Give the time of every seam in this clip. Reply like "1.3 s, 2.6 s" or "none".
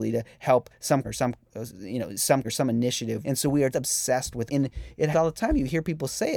1.0 s, 2.4 s, 3.2 s, 3.7 s, 4.5 s, 5.1 s

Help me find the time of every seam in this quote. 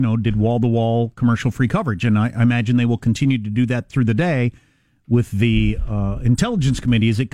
none

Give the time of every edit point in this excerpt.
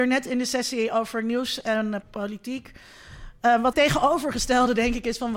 2.0 s, 3.7 s

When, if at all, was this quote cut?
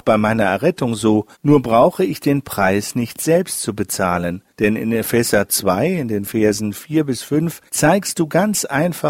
1.3 s, 4.5 s, 7.7 s

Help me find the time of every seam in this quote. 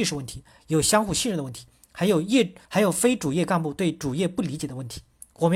2.6 s

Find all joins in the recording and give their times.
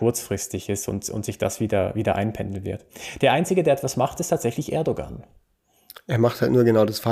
none

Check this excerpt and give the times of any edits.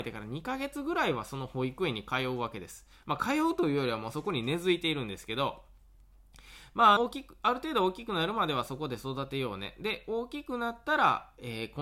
7.0 s

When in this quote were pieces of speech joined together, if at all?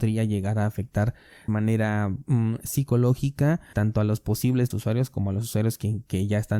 1.5 s, 3.7 s, 4.7 s

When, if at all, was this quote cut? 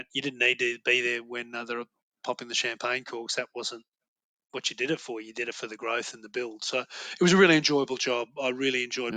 none

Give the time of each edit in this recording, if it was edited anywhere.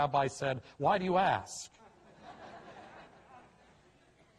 3.1 s

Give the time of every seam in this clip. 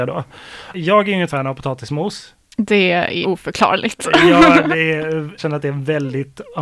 1.3 s, 3.2 s, 5.4 s

